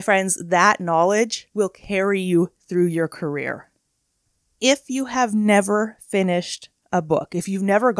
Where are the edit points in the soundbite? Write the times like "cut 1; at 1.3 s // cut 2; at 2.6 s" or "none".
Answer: none